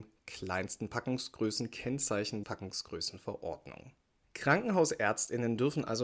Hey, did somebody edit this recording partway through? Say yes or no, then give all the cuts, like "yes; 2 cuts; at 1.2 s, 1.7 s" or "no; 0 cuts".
yes; 1 cut; at 2.4 s